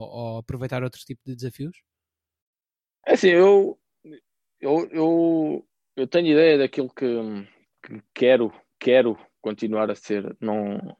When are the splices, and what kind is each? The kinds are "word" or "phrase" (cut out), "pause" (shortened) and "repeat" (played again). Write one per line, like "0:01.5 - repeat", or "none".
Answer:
0:08.7 - repeat